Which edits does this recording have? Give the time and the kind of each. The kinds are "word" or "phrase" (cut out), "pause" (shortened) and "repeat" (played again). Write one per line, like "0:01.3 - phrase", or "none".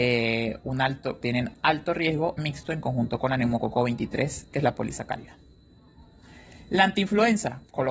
0:01.2 - word
0:02.4 - phrase
0:04.5 - word